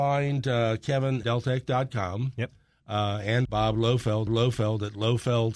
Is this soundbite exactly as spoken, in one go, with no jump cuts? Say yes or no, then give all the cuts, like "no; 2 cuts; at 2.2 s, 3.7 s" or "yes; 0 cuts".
no; 3 cuts; at 1.2 s, 3.4 s, 4.3 s